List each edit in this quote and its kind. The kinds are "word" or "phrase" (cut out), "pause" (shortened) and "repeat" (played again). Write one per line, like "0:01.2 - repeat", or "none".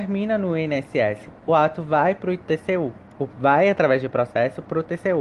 none